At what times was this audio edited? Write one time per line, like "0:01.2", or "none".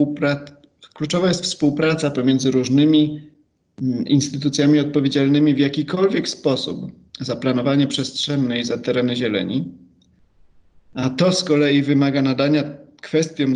0:07.1